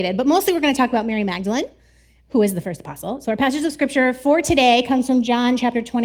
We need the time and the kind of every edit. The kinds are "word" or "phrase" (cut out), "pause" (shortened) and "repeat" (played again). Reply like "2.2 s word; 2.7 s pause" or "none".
none